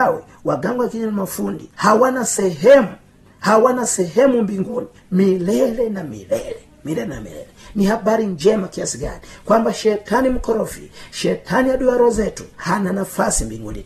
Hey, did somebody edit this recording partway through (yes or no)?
yes